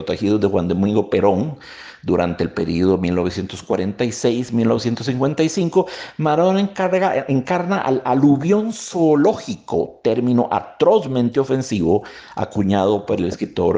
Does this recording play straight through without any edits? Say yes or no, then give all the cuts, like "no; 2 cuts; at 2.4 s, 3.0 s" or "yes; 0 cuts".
yes; 0 cuts